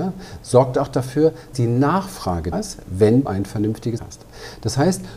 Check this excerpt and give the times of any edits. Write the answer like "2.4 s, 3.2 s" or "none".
1.5 s, 2.5 s, 3.3 s, 4.0 s